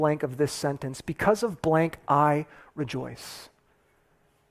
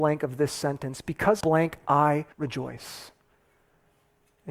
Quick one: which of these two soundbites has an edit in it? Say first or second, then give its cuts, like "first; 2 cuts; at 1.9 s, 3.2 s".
second; 2 cuts; at 1.4 s, 2.3 s